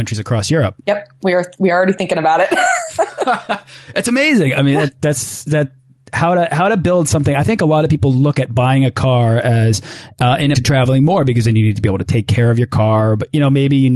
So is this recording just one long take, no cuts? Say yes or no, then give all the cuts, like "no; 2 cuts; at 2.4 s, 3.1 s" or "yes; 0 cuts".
no; 1 cut; at 10.5 s